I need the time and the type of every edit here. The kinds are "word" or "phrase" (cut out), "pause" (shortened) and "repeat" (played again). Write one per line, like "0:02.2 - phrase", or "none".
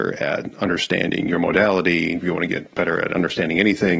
none